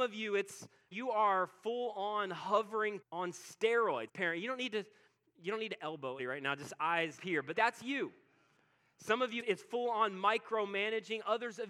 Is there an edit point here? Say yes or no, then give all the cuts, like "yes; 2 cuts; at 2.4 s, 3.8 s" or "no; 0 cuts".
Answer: yes; 7 cuts; at 0.9 s, 3.0 s, 4.1 s, 6.2 s, 7.2 s, 7.5 s, 9.4 s